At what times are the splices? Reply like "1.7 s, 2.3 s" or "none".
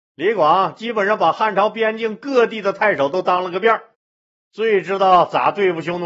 none